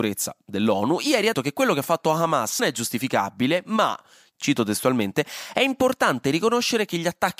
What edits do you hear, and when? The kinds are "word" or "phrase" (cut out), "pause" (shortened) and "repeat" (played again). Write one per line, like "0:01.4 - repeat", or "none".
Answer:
0:01.3 - word
0:02.6 - word